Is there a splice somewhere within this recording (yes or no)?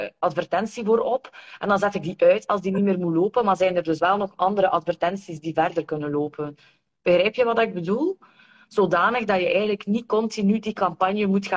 no